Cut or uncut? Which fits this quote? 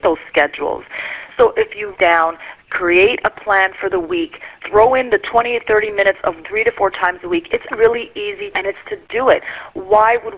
cut